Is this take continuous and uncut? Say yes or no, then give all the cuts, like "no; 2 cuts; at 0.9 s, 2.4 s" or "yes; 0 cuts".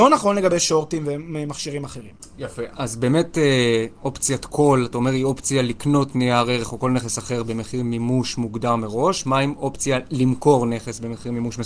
no; 1 cut; at 2.7 s